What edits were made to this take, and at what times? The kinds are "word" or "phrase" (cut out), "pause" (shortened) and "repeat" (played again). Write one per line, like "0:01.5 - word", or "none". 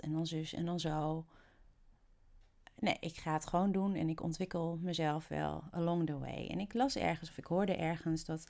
none